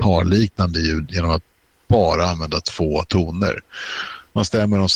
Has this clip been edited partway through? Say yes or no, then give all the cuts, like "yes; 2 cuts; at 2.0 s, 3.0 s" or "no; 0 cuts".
no; 0 cuts